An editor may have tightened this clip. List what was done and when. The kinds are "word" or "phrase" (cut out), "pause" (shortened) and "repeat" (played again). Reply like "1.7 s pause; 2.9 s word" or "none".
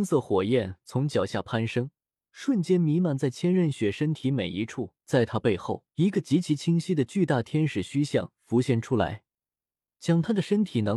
2.1 s pause; 5.0 s pause; 5.9 s pause